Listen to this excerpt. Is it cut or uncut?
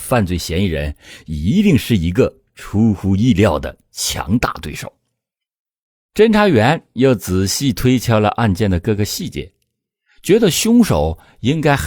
uncut